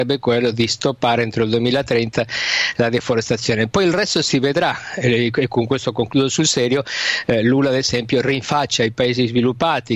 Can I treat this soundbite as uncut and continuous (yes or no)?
yes